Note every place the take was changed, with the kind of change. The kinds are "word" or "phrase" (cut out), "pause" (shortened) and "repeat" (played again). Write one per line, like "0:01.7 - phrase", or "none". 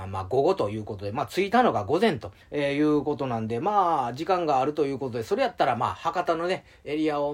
0:02.4 - pause